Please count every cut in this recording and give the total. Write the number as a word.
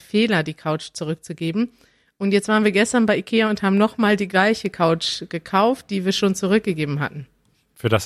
zero